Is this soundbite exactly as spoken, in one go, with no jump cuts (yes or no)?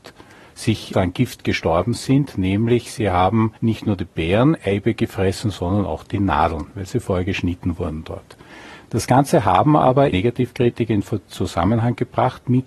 no